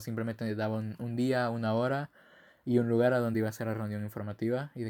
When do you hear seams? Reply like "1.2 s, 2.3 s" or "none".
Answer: none